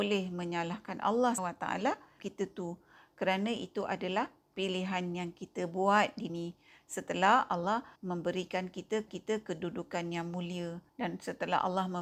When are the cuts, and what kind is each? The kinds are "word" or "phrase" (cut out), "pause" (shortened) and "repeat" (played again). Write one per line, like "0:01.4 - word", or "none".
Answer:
0:01.4 - word
0:02.2 - phrase
0:06.3 - word
0:08.0 - pause
0:09.1 - repeat
0:10.9 - pause